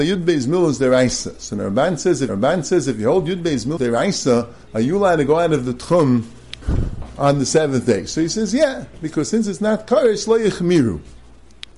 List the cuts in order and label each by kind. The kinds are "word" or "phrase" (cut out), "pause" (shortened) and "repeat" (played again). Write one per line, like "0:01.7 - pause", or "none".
0:02.3 - repeat
0:03.8 - word
0:04.6 - pause

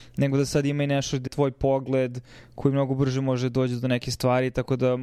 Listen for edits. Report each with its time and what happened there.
0:01.3 - word

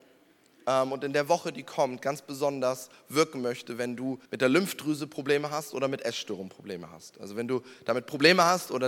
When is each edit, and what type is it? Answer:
0:04.3 - pause

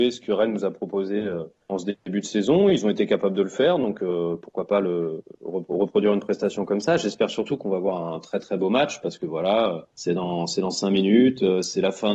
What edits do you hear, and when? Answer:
0:02.0 - pause
0:09.9 - pause

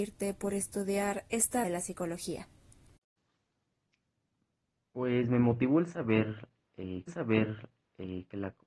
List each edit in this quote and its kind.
0:01.6 - word
0:07.1 - repeat

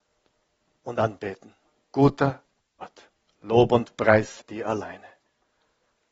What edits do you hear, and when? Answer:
0:01.7 - pause
0:03.3 - pause
0:04.4 - word

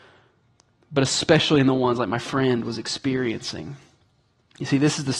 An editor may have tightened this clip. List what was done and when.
none

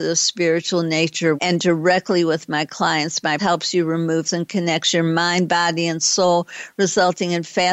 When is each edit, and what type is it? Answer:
0:01.4 - phrase
0:03.4 - word
0:04.3 - phrase

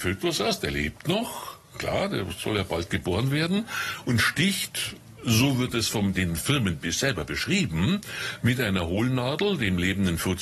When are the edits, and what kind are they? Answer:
none

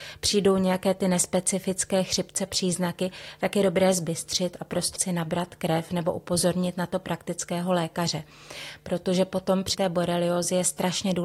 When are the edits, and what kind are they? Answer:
0:02.5 - word
0:05.0 - word
0:09.7 - word

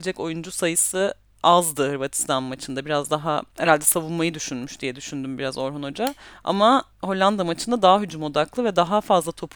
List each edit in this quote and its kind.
0:06.9 - pause

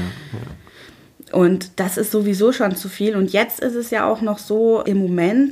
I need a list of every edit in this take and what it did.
none

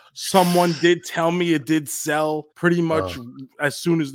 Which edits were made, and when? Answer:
0:02.5 - pause

